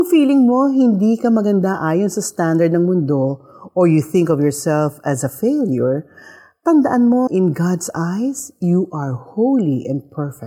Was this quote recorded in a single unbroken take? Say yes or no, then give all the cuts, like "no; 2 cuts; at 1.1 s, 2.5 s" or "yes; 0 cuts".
no; 1 cut; at 7.3 s